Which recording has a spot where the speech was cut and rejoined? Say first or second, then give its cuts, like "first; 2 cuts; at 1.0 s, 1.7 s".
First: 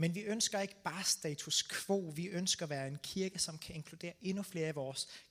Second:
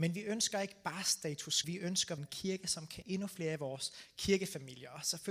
second; 3 cuts; at 1.6 s, 2.2 s, 3.0 s